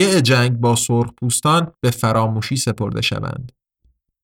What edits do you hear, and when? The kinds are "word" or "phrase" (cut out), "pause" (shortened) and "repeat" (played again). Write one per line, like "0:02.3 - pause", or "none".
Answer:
0:01.7 - pause